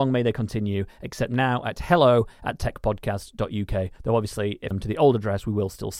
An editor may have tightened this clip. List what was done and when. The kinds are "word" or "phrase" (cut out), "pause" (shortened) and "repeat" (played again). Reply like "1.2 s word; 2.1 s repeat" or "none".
4.7 s phrase